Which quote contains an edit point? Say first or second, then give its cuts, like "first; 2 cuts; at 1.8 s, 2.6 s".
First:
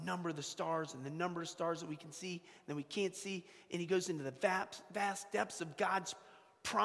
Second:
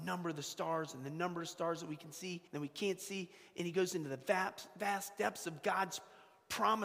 second; 1 cut; at 2.5 s